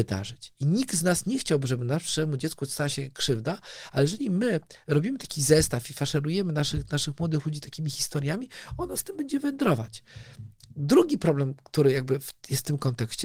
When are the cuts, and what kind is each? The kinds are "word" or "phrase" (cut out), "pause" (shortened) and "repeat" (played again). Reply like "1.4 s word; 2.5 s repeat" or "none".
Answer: none